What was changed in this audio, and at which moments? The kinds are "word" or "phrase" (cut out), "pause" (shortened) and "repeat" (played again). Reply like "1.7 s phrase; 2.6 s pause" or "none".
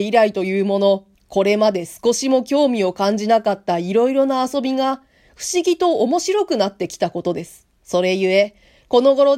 1.1 s pause; 7.8 s pause